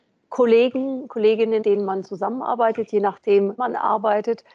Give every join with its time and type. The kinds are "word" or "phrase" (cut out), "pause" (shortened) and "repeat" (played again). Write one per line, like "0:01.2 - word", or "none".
0:01.6 - word
0:03.6 - word